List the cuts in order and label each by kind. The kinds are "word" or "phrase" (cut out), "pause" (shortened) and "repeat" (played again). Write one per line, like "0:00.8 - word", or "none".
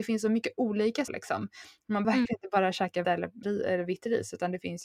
0:01.1 - word
0:02.0 - word
0:03.0 - word
0:03.4 - word